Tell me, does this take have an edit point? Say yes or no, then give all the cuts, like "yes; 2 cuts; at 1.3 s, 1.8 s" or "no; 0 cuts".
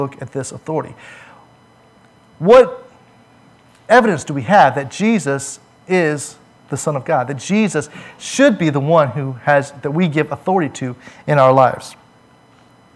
no; 0 cuts